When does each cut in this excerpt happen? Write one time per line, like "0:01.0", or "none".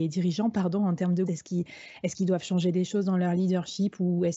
0:01.3